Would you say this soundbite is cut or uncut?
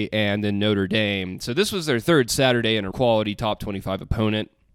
cut